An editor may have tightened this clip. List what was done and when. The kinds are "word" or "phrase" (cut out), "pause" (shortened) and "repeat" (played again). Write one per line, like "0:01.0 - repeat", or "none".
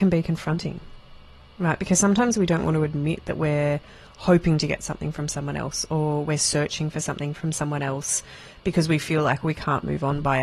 none